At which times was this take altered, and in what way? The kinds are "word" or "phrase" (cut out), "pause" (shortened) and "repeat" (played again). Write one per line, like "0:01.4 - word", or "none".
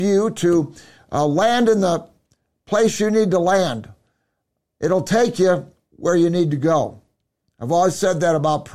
none